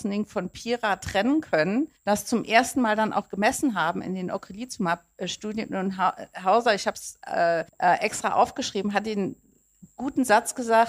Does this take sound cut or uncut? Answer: cut